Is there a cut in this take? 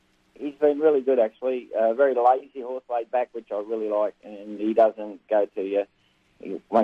no; 0 cuts

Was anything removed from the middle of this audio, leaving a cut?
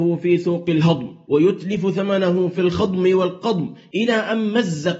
no; 0 cuts

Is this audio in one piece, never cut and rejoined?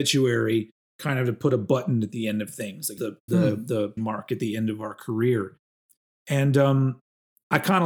no; 3 cuts; at 3.0 s, 3.3 s, 4.0 s

